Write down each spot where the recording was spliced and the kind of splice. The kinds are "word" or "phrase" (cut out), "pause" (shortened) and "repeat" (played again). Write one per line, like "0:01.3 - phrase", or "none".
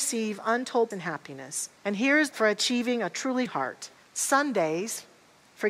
0:00.9 - word
0:01.8 - pause
0:02.3 - phrase
0:03.5 - word
0:04.0 - pause